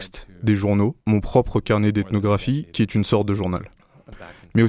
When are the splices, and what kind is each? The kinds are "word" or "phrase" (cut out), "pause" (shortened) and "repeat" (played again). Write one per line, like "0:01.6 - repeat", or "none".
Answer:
0:01.0 - pause